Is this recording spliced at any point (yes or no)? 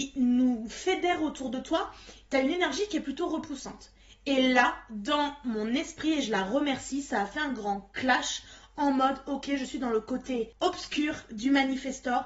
no